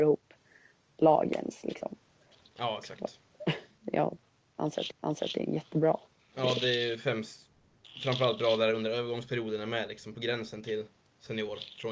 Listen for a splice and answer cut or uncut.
cut